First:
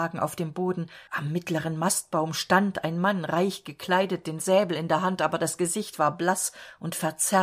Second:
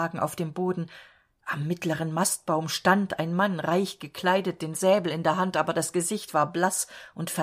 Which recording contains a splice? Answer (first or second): first